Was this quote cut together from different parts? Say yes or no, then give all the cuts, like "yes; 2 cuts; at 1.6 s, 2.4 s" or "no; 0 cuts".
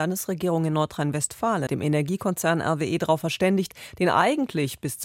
yes; 1 cut; at 1.7 s